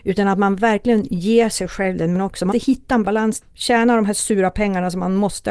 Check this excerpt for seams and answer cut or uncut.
cut